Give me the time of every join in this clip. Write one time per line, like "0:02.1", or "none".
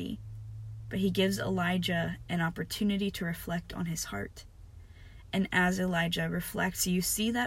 none